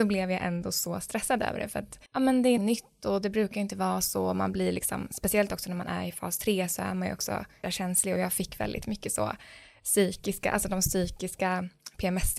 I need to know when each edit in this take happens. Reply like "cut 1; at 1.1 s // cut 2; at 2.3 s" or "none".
cut 1; at 2.1 s // cut 2; at 2.6 s // cut 3; at 7.6 s